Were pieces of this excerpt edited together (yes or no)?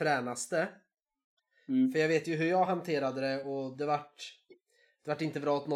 no